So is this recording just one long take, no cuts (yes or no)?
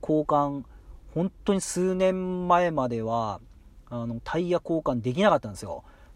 yes